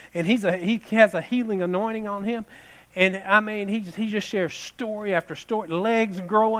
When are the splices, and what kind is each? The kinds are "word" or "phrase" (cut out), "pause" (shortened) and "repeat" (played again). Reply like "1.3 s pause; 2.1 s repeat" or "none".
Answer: none